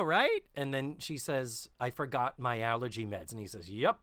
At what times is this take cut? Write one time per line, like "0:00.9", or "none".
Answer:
0:01.7